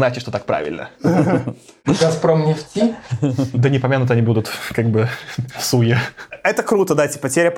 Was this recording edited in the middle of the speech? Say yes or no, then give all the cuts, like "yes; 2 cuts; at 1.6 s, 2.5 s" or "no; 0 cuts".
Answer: no; 0 cuts